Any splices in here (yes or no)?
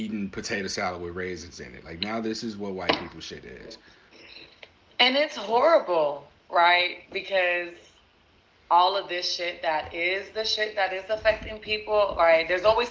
no